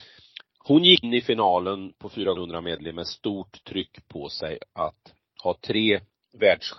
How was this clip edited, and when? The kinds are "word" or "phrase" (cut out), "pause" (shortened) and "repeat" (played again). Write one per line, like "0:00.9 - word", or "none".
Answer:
0:01.0 - word
0:02.3 - word